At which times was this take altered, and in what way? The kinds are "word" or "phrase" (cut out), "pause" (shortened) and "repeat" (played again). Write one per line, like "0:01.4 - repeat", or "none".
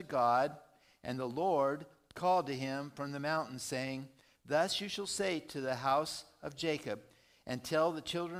none